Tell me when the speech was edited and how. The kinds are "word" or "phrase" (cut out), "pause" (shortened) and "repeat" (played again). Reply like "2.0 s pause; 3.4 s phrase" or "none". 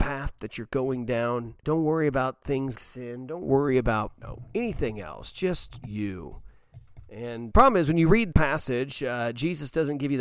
1.6 s pause; 2.7 s word; 4.2 s word; 5.8 s word; 7.5 s word; 8.3 s word